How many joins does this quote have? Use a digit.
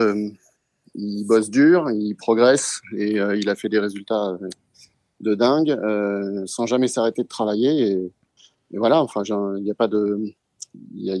0